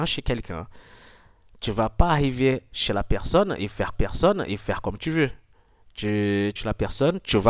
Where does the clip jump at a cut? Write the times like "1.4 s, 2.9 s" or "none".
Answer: 3.9 s, 6.6 s

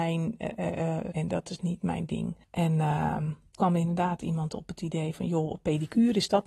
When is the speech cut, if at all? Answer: 1.1 s, 2.4 s, 3.6 s

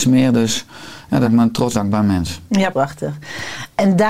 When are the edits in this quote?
1.2 s, 1.7 s, 2.7 s

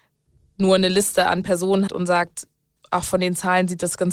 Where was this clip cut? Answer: 1.9 s

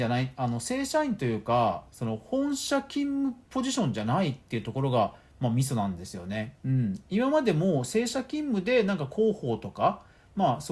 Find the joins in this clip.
6.6 s

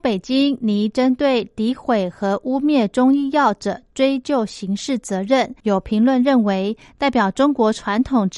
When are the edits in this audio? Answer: 5.6 s

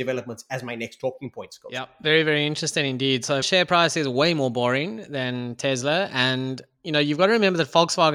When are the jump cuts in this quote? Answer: 3.4 s

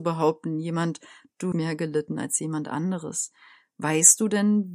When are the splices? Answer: 1.5 s

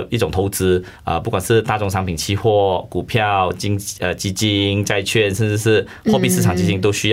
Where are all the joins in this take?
1.0 s

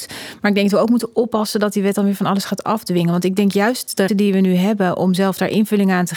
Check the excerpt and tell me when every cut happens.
4.1 s

